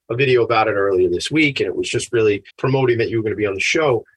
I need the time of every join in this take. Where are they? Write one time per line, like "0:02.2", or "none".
0:02.5